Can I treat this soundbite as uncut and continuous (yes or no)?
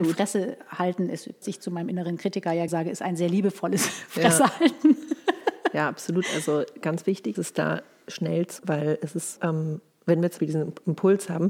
no